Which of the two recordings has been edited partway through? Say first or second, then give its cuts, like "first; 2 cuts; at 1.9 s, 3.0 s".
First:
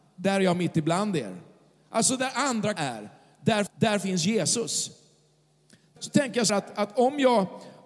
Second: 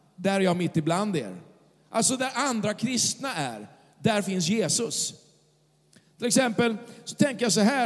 first; 4 cuts; at 2.8 s, 3.7 s, 6.0 s, 6.5 s